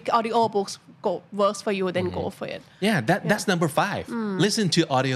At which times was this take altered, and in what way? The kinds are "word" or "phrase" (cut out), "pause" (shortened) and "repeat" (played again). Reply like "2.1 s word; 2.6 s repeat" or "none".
none